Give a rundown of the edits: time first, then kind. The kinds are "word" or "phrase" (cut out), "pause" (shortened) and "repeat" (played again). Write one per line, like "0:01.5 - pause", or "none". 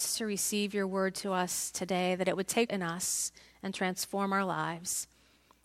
0:02.7 - word